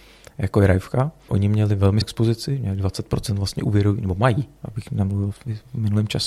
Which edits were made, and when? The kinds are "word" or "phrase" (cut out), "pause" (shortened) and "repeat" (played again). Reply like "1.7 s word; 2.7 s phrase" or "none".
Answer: 1.3 s word; 2.0 s word